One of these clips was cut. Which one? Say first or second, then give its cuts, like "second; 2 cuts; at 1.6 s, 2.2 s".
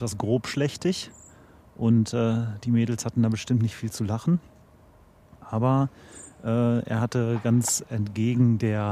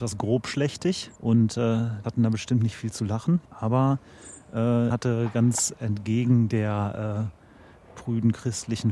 second; 4 cuts; at 1.2 s, 2.0 s, 3.4 s, 4.9 s